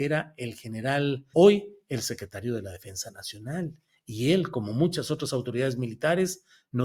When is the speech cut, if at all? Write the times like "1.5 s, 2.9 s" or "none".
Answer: 1.3 s